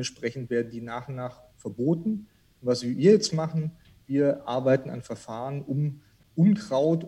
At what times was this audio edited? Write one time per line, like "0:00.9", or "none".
none